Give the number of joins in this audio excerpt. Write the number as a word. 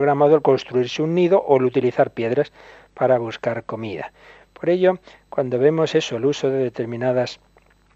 zero